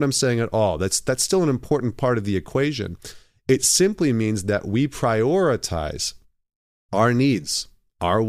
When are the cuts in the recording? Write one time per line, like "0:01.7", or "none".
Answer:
none